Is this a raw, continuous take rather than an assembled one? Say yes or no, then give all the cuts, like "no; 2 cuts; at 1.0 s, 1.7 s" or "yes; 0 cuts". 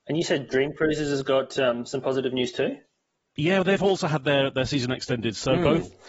yes; 0 cuts